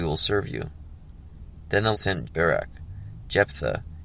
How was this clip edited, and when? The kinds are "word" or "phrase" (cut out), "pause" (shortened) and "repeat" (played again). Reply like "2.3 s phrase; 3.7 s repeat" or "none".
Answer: 1.9 s word; 2.2 s word